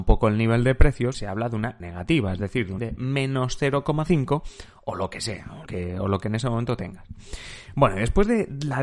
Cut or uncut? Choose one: cut